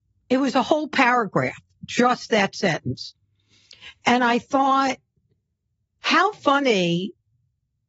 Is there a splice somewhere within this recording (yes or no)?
no